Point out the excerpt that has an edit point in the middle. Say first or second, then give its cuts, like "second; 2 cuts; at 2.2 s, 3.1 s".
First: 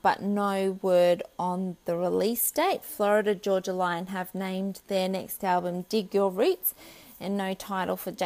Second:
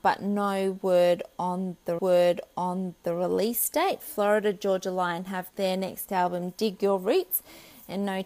second; 2 cuts; at 2.0 s, 5.5 s